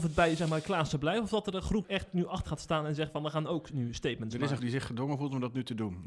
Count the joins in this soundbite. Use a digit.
3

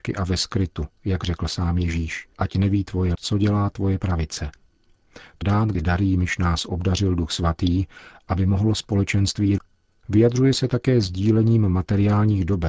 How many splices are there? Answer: 6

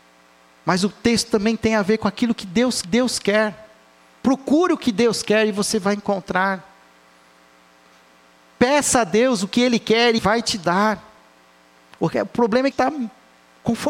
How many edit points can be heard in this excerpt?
3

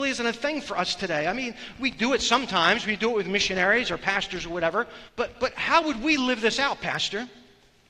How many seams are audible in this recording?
1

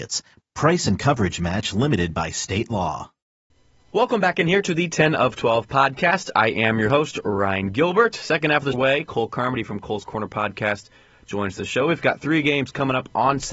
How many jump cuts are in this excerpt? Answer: 2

